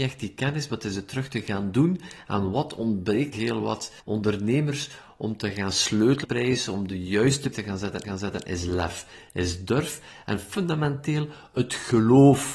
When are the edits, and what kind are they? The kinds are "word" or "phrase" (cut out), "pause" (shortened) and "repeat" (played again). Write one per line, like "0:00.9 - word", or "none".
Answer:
0:03.3 - word
0:04.0 - pause
0:06.2 - phrase
0:07.5 - word
0:08.0 - repeat